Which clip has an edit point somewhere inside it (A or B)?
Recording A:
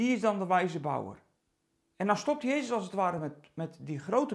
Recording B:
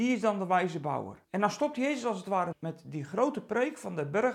B